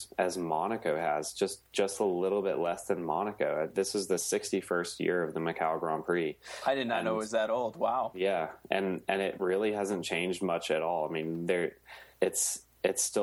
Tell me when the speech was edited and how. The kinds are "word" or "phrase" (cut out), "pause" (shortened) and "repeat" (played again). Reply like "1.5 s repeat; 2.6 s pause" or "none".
12.1 s pause